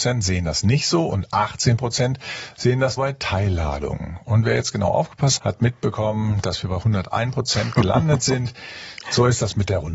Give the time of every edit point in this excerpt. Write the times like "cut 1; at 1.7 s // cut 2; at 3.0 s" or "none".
cut 1; at 3.0 s // cut 2; at 5.4 s